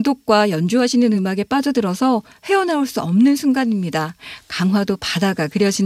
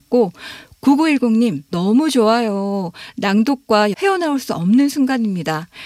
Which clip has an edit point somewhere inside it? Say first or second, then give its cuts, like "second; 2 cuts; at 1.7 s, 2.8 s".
second; 2 cuts; at 1.7 s, 3.9 s